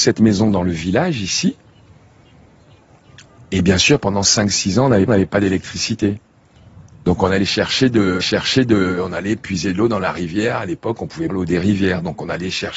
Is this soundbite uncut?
no; 3 cuts; at 5.1 s, 8.2 s, 11.3 s

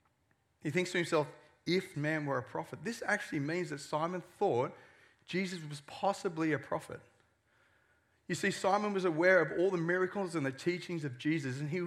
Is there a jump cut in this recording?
yes; 1 cut; at 1.9 s

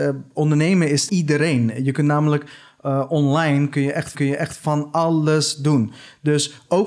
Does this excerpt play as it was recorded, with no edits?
no; 2 cuts; at 1.1 s, 4.1 s

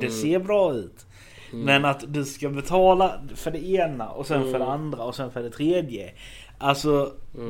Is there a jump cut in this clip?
no; 0 cuts

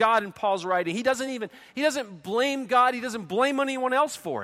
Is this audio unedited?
yes; 0 cuts

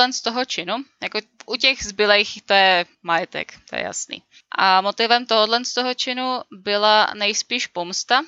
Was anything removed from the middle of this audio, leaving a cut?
no; 0 cuts

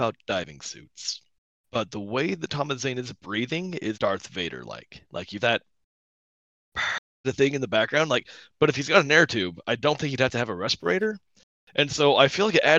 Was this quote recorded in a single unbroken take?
no; 3 cuts; at 3.9 s, 5.4 s, 7.2 s

